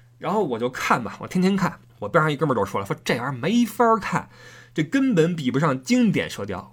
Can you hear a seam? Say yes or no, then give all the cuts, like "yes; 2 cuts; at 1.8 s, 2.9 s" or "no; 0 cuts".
yes; 1 cut; at 1.9 s